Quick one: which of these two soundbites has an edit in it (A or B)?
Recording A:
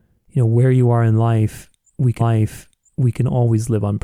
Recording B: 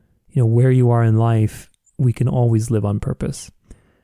A